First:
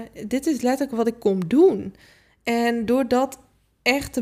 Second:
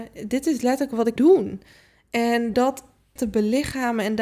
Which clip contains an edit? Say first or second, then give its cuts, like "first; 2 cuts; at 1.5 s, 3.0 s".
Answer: second; 3 cuts; at 1.2 s, 2.5 s, 3.2 s